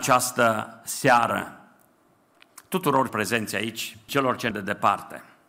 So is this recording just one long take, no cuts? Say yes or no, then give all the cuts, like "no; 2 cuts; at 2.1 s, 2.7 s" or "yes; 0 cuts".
no; 3 cuts; at 3.1 s, 4.1 s, 4.5 s